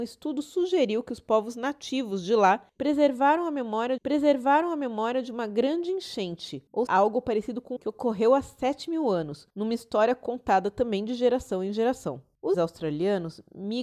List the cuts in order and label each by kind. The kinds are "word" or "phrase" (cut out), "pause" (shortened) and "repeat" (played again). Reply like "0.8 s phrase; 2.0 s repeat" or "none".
4.0 s repeat; 6.9 s word; 7.8 s phrase; 12.5 s word